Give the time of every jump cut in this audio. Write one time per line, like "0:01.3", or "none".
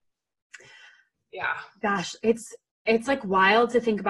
none